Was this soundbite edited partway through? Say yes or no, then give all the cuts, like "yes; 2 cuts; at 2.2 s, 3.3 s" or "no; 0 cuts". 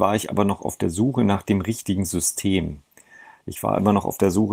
no; 0 cuts